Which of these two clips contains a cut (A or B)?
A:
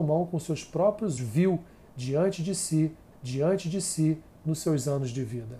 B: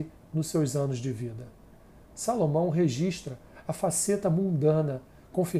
A